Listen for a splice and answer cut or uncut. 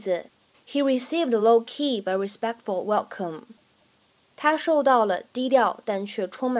uncut